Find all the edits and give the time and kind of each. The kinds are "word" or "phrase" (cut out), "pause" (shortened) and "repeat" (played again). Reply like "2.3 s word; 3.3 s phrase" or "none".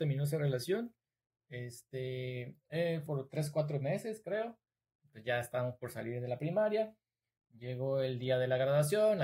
3.1 s phrase